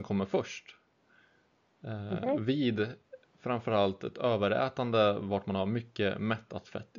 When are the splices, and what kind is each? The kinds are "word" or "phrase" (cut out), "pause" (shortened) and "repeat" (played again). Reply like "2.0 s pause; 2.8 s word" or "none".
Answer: none